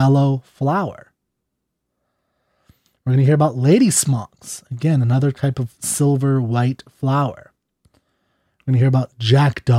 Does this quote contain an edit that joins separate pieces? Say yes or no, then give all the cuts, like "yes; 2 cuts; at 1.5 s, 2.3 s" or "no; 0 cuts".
no; 0 cuts